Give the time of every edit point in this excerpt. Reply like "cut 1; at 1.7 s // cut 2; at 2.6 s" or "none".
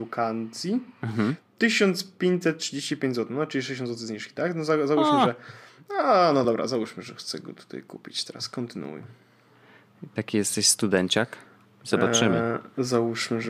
none